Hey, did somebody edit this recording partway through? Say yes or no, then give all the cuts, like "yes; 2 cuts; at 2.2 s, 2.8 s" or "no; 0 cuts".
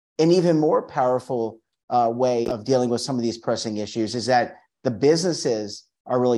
yes; 1 cut; at 2.4 s